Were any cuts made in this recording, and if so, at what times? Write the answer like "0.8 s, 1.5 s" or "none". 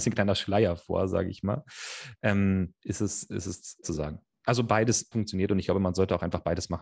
2.8 s, 3.8 s, 5.1 s